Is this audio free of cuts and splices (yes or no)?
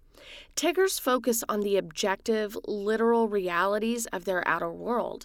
yes